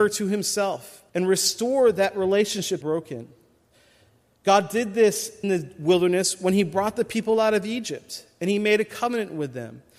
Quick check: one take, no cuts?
no; 3 cuts; at 1.1 s, 2.8 s, 5.4 s

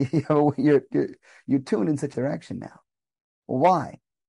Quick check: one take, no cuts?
no; 1 cut; at 2.1 s

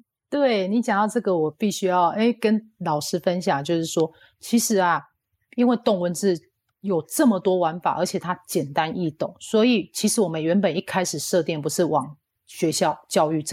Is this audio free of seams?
yes; 0 cuts

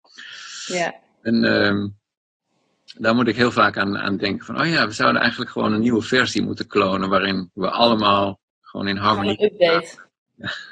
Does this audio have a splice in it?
no; 0 cuts

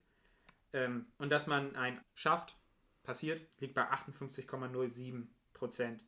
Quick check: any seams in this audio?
yes; 3 cuts; at 1.1 s, 2.0 s, 3.5 s

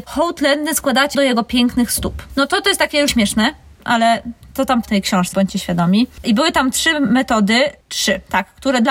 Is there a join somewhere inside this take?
yes; 5 cuts; at 1.1 s, 3.1 s, 4.8 s, 5.3 s, 6.2 s

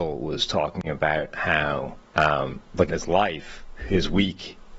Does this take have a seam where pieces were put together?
yes; 1 cut; at 2.9 s

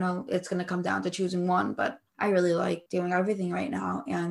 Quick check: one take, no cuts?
no; 2 cuts; at 2.1 s, 2.9 s

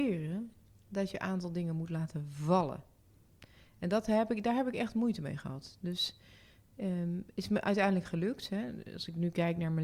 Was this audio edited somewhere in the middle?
no; 0 cuts

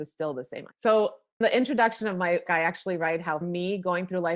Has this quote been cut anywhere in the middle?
yes; 3 cuts; at 1.4 s, 2.5 s, 3.4 s

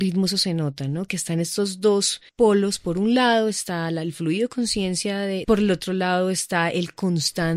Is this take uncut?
no; 2 cuts; at 2.3 s, 5.4 s

